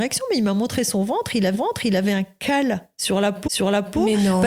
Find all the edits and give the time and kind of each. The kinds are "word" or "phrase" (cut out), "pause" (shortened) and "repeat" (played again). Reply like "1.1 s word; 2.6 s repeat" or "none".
1.5 s repeat; 3.5 s repeat